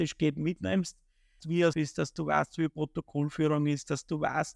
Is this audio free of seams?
no; 2 cuts; at 1.4 s, 1.7 s

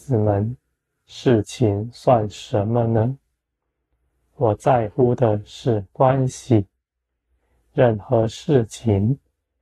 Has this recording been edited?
no; 0 cuts

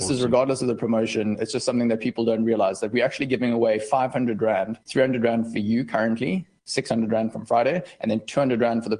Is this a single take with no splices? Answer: no; 1 cut; at 4.8 s

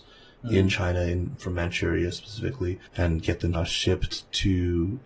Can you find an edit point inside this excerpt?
yes; 3 cuts; at 1.4 s, 2.9 s, 3.5 s

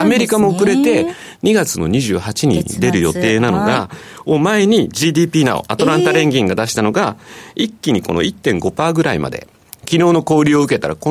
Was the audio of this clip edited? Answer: no; 0 cuts

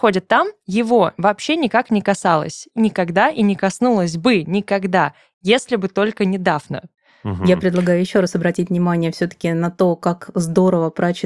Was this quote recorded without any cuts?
yes; 0 cuts

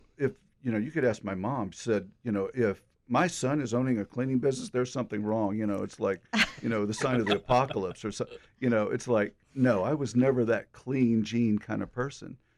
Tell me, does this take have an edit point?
no; 0 cuts

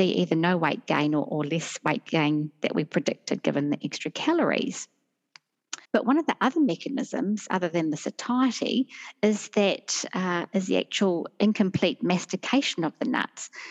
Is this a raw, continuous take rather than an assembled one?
no; 1 cut; at 5.8 s

